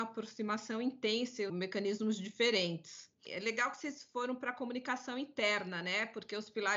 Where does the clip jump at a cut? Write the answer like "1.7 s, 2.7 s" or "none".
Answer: 1.5 s

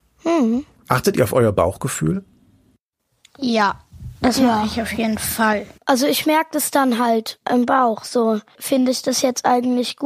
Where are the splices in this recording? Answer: none

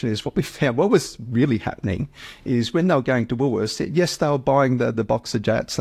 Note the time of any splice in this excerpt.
none

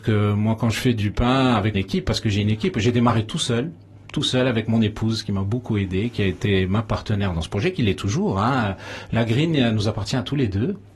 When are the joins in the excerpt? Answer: 1.7 s

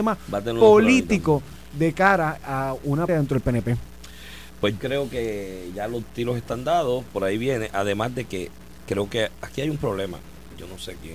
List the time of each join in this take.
2.4 s, 3.1 s, 4.8 s

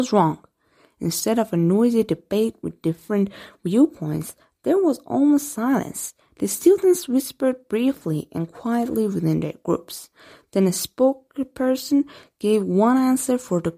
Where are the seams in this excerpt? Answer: none

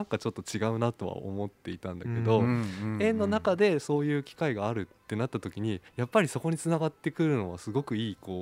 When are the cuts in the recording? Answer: 5.9 s

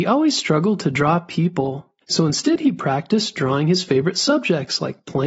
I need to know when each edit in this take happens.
2.0 s

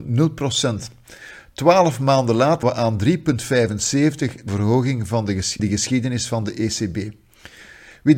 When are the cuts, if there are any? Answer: 2.6 s, 4.5 s, 5.6 s

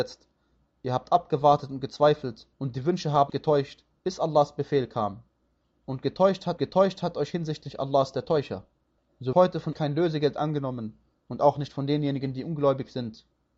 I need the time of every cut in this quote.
2.5 s, 3.3 s, 6.6 s, 9.3 s, 9.7 s

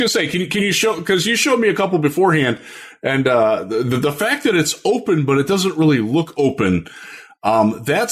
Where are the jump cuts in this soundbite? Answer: none

